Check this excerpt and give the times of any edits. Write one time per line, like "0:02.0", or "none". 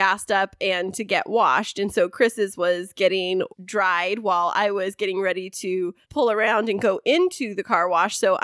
0:03.5
0:06.0